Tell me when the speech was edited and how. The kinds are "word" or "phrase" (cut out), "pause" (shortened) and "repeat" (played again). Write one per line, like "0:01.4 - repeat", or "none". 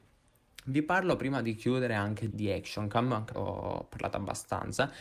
0:02.3 - word
0:03.3 - word